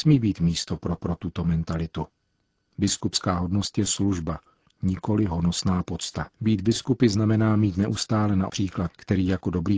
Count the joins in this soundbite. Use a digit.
4